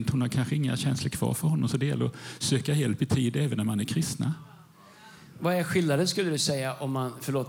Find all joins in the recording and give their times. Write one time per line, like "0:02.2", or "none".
none